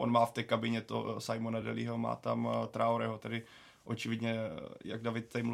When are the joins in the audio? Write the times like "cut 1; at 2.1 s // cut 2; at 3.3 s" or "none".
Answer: none